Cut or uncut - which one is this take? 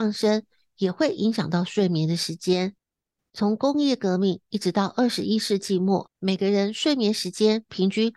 cut